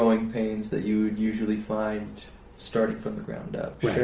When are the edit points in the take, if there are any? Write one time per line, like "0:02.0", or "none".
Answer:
none